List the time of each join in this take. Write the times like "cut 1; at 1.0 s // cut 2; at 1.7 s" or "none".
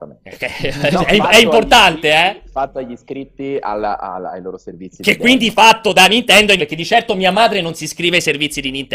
cut 1; at 6.6 s